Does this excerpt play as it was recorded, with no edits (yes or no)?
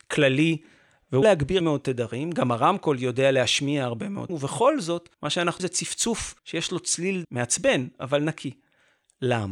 no